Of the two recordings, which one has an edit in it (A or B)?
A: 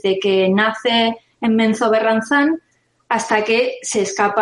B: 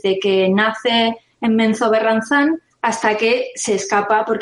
B